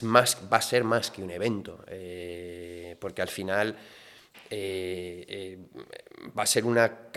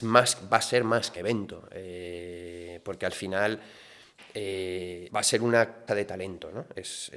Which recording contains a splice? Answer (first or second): second